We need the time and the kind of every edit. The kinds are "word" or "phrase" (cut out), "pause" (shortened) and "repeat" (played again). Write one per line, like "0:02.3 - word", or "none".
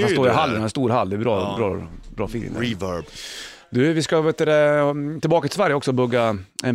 none